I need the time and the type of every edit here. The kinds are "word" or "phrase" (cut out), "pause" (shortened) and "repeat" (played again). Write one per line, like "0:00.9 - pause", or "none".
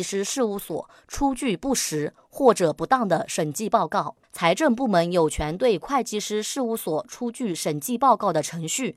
0:04.2 - pause